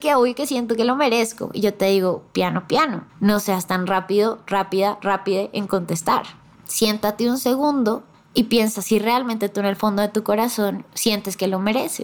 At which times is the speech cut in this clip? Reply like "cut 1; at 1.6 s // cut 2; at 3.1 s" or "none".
cut 1; at 3.1 s // cut 2; at 6.5 s // cut 3; at 8.1 s // cut 4; at 10.9 s